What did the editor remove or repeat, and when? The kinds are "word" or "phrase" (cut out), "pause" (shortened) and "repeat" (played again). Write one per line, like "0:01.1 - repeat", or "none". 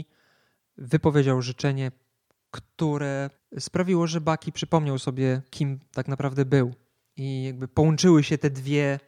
0:03.4 - pause